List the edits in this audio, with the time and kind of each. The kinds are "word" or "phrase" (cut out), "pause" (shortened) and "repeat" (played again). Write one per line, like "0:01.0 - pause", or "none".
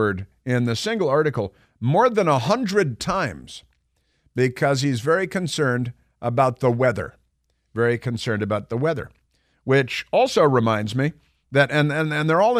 none